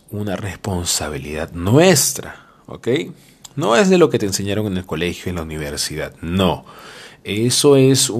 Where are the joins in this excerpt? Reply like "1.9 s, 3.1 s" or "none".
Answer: none